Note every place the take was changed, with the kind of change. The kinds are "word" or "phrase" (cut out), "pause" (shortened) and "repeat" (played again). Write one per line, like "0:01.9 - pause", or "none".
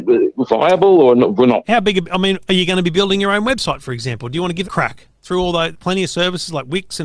0:01.6 - word
0:04.6 - word
0:05.7 - word